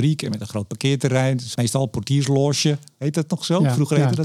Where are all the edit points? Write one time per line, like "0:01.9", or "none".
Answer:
0:01.6